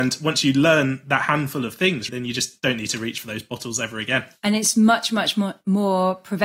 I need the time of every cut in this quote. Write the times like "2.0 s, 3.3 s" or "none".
2.1 s